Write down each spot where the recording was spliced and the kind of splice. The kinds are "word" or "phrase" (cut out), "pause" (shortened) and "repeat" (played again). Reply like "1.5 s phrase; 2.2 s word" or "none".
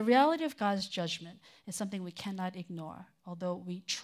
none